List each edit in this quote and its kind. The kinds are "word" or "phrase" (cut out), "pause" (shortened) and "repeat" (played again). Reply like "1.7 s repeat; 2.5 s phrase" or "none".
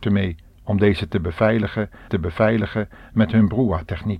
2.1 s repeat